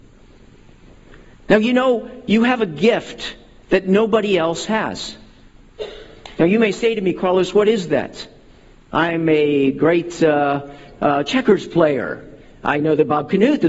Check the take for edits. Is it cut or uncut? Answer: uncut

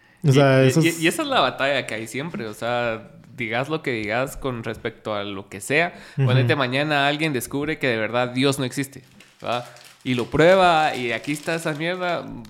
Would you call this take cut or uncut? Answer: uncut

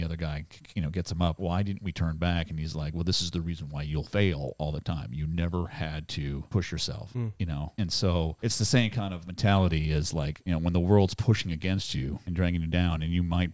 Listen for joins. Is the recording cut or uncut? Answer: cut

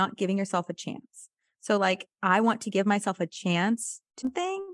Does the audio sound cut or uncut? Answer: uncut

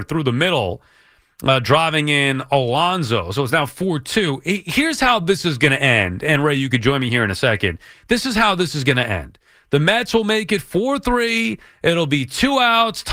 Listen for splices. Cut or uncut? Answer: uncut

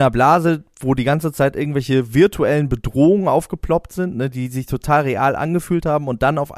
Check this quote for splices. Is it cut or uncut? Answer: uncut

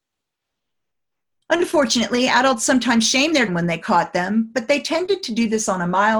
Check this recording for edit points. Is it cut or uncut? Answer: cut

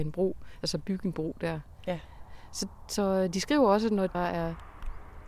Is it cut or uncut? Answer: cut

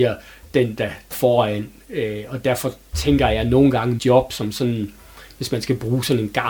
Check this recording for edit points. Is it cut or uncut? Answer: cut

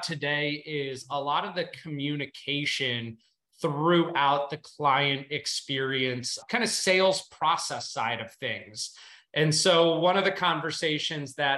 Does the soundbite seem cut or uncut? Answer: uncut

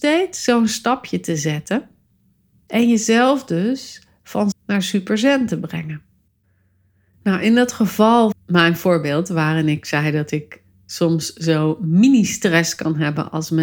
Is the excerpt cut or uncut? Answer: cut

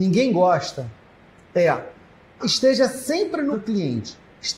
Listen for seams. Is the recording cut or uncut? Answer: cut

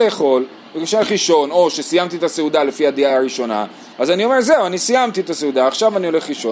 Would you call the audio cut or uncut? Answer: uncut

